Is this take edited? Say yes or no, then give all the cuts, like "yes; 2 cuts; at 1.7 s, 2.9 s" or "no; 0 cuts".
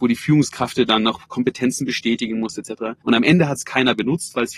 yes; 1 cut; at 3.0 s